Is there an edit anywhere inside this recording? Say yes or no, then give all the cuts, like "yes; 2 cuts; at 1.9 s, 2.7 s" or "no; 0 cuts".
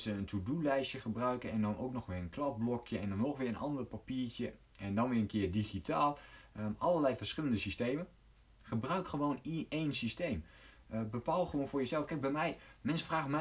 no; 0 cuts